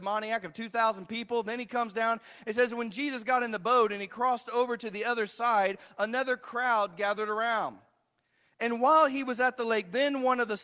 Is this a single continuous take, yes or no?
yes